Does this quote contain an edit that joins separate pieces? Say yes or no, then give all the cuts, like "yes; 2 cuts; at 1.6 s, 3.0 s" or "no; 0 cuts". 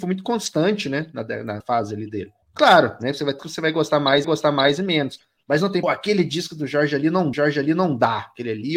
yes; 6 cuts; at 1.6 s, 2.4 s, 3.4 s, 4.2 s, 5.8 s, 7.3 s